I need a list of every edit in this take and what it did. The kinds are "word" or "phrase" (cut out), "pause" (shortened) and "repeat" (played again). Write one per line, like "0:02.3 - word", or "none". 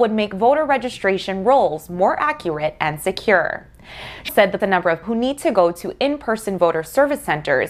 0:04.3 - word
0:04.6 - phrase
0:05.0 - word